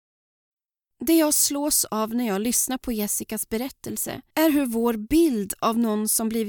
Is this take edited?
yes; 1 cut; at 4.3 s

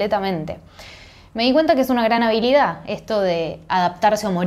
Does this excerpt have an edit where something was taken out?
no; 0 cuts

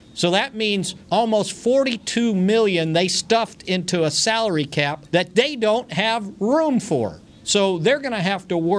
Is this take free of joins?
no; 3 cuts; at 1.0 s, 5.1 s, 7.2 s

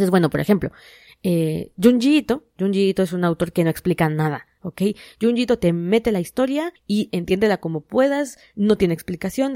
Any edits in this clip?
yes; 1 cut; at 6.8 s

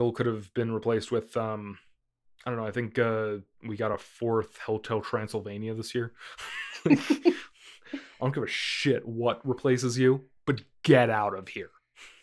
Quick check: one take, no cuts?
yes; 0 cuts

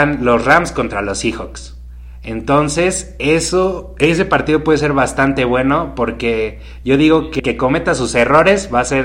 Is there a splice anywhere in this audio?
yes; 1 cut; at 7.4 s

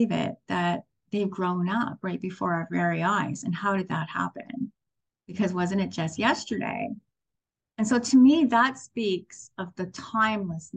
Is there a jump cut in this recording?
no; 0 cuts

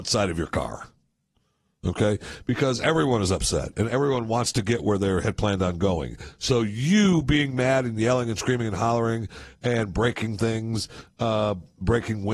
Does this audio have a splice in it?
no; 0 cuts

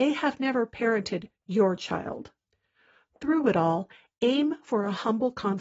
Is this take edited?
no; 0 cuts

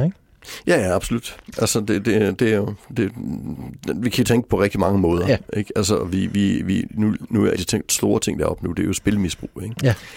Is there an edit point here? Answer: yes; 1 cut; at 7.5 s

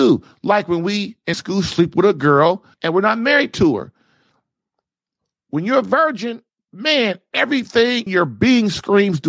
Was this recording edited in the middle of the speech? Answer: yes; 4 cuts; at 1.3 s, 2.7 s, 6.5 s, 8.1 s

